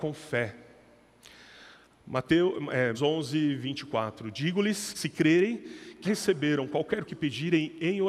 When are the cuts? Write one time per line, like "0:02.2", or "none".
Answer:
0:02.9
0:04.9
0:06.0
0:07.1